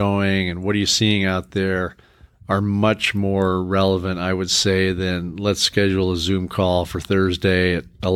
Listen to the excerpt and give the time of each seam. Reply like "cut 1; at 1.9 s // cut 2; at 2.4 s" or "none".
none